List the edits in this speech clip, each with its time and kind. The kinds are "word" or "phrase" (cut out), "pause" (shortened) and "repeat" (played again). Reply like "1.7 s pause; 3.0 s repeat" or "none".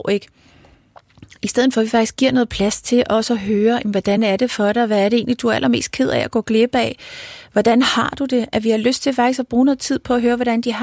none